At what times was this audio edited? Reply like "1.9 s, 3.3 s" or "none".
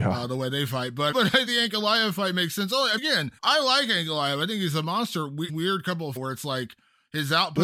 1.1 s, 1.5 s, 3.0 s, 3.4 s, 5.5 s, 6.2 s